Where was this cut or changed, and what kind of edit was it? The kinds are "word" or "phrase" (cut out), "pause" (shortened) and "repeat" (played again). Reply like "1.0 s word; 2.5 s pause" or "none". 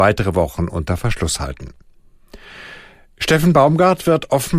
none